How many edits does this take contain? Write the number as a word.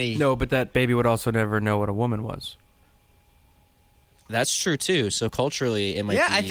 zero